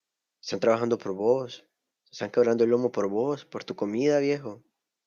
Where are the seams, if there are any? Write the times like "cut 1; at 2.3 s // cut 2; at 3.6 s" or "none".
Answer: none